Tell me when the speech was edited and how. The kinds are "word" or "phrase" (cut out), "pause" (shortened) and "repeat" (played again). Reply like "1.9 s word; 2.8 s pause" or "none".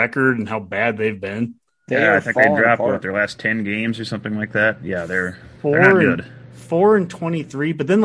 none